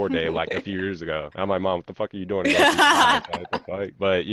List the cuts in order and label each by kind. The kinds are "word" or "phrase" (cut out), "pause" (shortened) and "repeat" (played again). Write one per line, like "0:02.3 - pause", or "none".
none